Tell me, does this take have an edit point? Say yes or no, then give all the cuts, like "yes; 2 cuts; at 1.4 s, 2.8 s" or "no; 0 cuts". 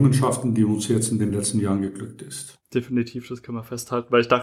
no; 0 cuts